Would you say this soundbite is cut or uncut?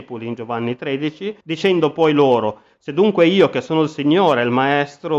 cut